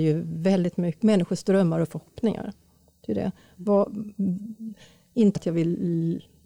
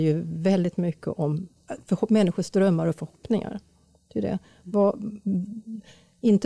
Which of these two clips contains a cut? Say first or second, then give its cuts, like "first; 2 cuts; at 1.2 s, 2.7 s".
first; 2 cuts; at 1.0 s, 5.4 s